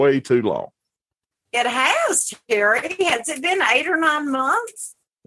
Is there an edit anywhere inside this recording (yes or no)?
yes